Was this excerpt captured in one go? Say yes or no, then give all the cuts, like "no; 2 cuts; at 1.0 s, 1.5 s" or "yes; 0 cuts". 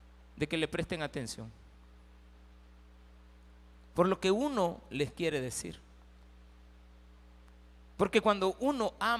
yes; 0 cuts